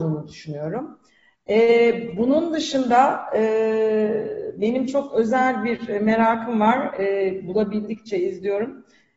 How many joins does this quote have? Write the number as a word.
zero